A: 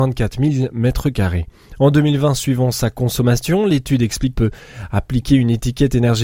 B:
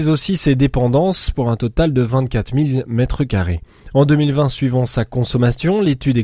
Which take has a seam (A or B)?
A